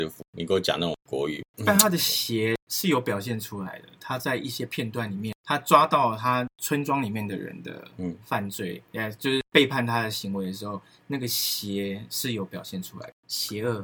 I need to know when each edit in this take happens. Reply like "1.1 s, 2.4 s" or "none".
none